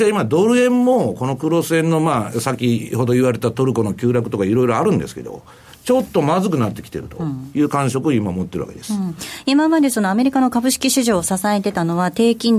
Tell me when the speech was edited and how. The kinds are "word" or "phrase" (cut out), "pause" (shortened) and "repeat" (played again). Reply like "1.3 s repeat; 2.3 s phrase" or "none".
none